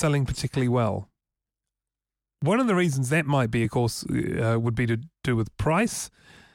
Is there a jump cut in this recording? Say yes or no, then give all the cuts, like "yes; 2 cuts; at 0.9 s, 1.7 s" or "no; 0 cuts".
no; 0 cuts